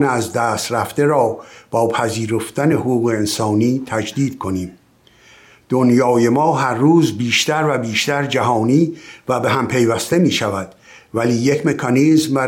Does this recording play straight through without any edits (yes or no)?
yes